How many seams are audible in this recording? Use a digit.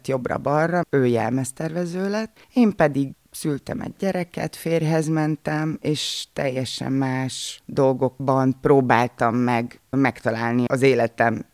1